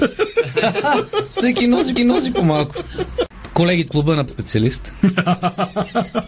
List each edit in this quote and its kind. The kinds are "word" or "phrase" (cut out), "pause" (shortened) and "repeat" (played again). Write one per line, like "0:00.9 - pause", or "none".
0:02.0 - repeat
0:03.9 - word
0:04.3 - word